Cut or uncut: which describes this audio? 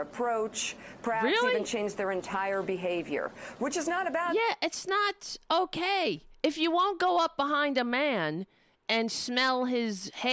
uncut